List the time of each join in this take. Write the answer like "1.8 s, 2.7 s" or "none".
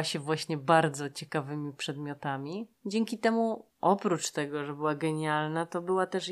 2.8 s